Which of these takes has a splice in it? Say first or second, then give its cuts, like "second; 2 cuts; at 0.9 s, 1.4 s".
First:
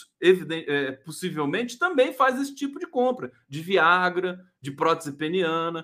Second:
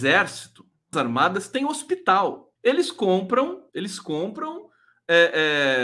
second; 3 cuts; at 0.9 s, 2.6 s, 3.7 s